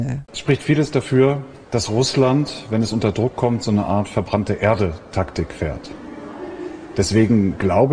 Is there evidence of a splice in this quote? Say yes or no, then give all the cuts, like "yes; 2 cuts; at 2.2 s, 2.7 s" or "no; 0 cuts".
no; 0 cuts